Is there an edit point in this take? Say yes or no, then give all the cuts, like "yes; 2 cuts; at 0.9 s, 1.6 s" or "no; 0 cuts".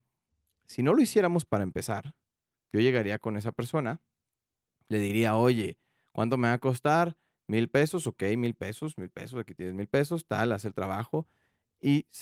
no; 0 cuts